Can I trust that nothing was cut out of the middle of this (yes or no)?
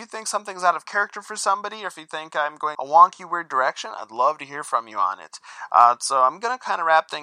no